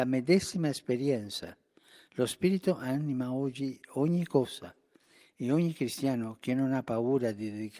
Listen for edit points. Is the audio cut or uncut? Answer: uncut